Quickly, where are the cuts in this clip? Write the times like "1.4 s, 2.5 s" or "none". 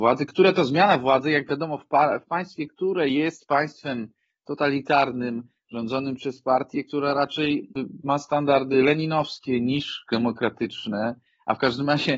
none